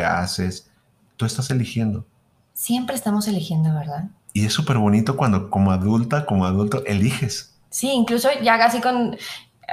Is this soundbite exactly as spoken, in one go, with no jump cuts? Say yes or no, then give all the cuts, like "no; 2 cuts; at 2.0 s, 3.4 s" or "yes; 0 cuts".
yes; 0 cuts